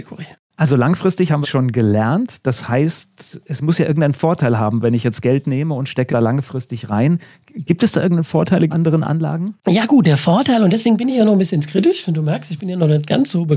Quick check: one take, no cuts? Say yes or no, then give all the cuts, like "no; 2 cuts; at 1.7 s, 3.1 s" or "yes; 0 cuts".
no; 4 cuts; at 1.4 s, 6.1 s, 8.7 s, 9.6 s